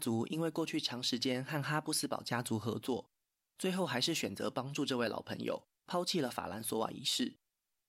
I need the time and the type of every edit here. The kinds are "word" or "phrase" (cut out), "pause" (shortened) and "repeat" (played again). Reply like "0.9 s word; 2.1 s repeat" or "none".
none